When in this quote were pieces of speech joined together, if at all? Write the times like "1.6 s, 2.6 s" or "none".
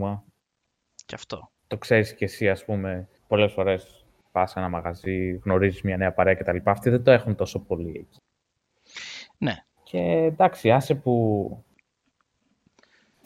3.2 s, 9.7 s